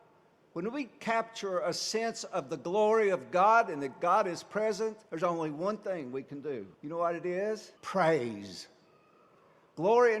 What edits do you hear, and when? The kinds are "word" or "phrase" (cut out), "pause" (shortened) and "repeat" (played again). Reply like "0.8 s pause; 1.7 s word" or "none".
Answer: 5.1 s pause; 6.7 s pause; 7.8 s pause